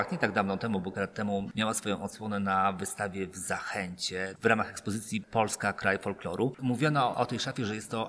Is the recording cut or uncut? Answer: cut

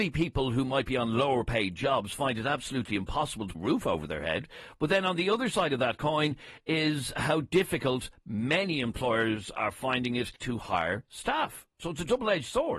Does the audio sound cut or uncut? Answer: cut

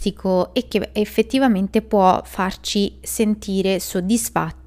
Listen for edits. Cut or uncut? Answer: uncut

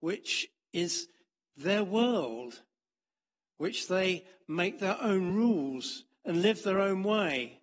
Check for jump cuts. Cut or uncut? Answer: uncut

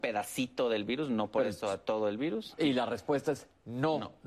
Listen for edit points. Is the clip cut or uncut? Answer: uncut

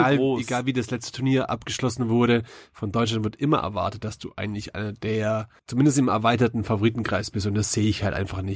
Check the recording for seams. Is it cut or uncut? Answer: cut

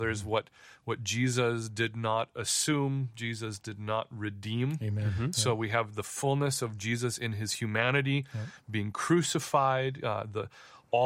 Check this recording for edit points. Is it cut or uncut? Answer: uncut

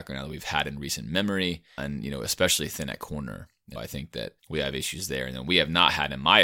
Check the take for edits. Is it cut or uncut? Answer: cut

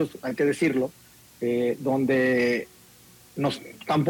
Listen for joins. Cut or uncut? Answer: uncut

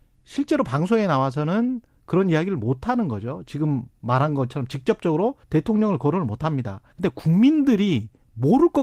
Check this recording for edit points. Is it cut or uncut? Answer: cut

